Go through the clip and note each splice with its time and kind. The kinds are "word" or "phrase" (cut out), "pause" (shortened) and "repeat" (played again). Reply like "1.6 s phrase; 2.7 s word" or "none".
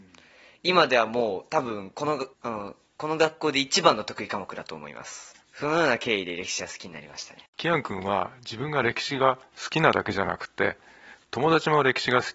2.3 s pause; 5.4 s pause; 7.5 s pause